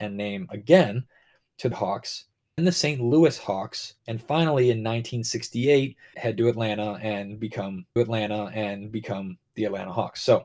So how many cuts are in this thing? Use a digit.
5